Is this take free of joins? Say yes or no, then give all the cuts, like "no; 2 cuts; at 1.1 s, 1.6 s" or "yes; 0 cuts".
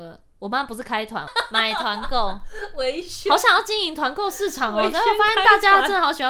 no; 1 cut; at 1.3 s